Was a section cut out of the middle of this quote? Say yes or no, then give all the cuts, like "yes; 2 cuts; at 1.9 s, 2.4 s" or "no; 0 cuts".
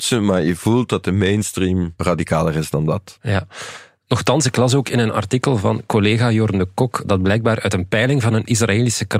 no; 0 cuts